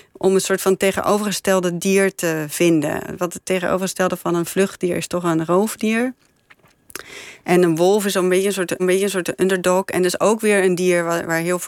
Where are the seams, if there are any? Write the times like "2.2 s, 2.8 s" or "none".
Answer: 8.8 s